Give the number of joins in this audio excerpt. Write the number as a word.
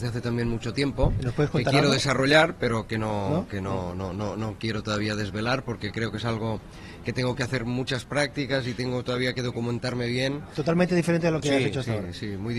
zero